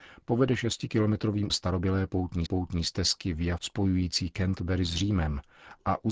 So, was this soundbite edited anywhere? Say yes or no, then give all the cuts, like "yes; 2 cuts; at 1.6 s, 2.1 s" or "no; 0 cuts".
yes; 3 cuts; at 1.5 s, 2.5 s, 3.6 s